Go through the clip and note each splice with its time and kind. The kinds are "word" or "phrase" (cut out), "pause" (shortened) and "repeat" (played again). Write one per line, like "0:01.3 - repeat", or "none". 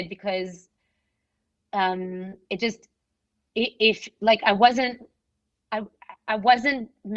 none